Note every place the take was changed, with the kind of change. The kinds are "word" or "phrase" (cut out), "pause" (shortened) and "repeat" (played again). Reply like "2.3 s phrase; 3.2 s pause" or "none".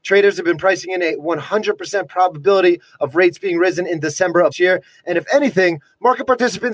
4.5 s word